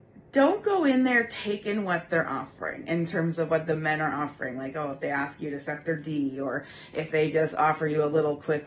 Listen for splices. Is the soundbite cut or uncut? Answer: uncut